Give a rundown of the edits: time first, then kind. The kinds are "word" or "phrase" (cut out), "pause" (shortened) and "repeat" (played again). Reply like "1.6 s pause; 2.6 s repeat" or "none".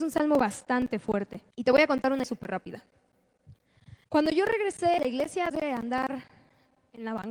1.5 s pause; 2.2 s word; 4.0 s pause; 5.0 s word; 5.5 s word